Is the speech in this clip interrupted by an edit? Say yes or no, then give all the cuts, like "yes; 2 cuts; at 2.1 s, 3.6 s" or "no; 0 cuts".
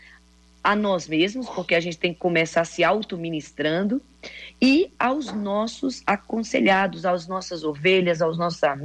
no; 0 cuts